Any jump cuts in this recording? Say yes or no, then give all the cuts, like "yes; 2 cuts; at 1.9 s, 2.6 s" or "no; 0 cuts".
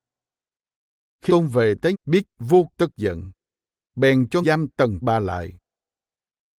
yes; 6 cuts; at 1.3 s, 1.9 s, 2.2 s, 2.7 s, 4.4 s, 5.0 s